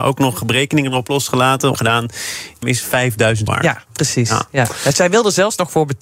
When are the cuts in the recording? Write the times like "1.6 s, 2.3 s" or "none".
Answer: 1.7 s, 2.6 s, 3.5 s